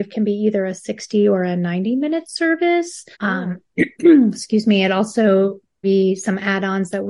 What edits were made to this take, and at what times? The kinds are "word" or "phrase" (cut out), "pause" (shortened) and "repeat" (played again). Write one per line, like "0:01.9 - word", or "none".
0:03.1 - pause
0:05.8 - word

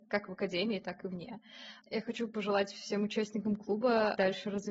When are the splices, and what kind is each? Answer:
0:01.8 - pause

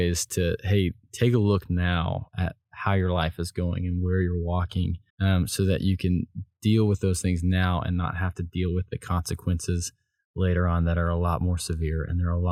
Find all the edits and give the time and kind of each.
0:05.1 - pause

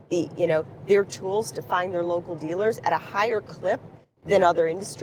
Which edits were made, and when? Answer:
none

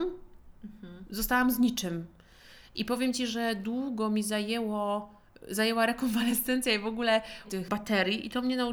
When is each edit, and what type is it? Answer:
0:07.4 - word

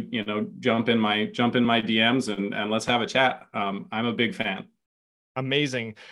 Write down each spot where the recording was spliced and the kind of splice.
none

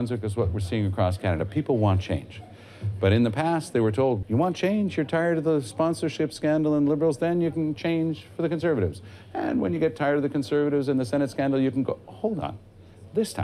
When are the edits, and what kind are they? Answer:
0:04.2 - word

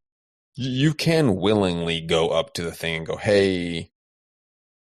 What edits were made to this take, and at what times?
none

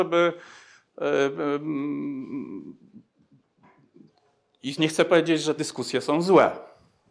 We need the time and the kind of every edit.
0:04.8 - word
0:05.6 - word

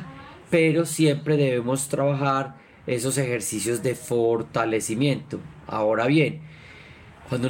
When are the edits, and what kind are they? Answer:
none

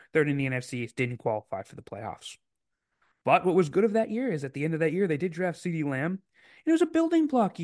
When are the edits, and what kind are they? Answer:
none

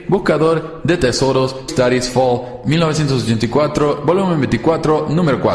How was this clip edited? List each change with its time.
0:01.7 - word

